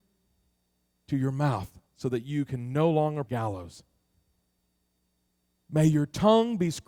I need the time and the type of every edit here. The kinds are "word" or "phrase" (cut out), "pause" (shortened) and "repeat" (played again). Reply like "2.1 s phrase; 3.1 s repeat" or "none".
1.9 s pause; 3.3 s phrase